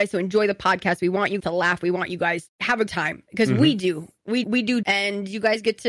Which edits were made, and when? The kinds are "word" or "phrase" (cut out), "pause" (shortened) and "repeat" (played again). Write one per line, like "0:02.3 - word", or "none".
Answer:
0:01.4 - word
0:02.5 - word
0:02.9 - word
0:04.4 - word
0:04.8 - word